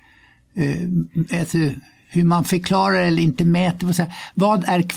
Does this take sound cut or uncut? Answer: uncut